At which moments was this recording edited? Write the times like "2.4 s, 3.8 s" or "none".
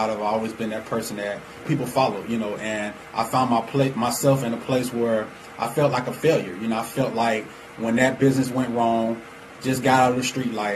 none